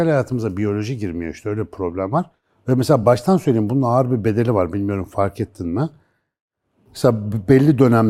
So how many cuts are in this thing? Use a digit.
0